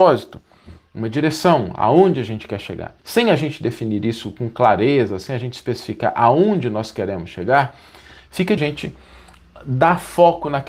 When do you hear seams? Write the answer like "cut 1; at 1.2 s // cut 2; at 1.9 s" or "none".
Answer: cut 1; at 3.0 s // cut 2; at 8.6 s